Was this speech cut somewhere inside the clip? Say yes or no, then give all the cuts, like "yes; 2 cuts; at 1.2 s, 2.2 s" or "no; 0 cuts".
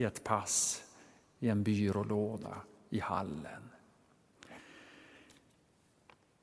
no; 0 cuts